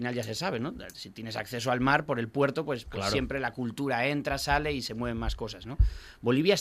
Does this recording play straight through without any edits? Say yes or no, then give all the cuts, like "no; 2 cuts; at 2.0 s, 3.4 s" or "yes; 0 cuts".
yes; 0 cuts